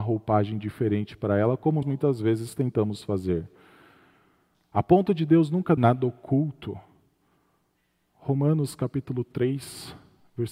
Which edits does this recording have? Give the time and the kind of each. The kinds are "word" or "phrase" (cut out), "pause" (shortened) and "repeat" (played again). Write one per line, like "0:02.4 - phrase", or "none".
0:01.8 - word
0:05.8 - word